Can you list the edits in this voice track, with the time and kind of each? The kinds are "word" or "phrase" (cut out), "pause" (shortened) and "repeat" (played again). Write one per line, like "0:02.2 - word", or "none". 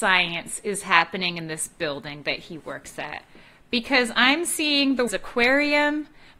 0:05.1 - word

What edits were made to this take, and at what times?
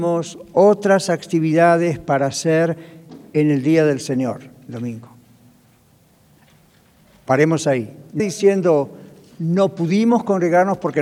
0:08.2 - word

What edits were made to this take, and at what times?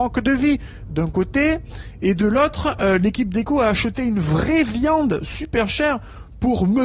none

